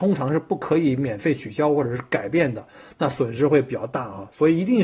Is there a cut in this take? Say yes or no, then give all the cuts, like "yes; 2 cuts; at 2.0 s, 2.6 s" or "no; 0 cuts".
no; 0 cuts